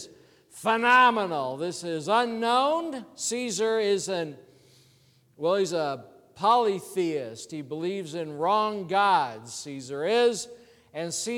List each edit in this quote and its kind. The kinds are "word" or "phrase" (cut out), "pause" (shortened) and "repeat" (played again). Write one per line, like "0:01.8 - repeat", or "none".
none